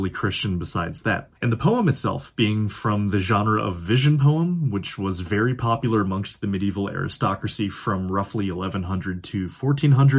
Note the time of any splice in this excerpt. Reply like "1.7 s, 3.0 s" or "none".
1.4 s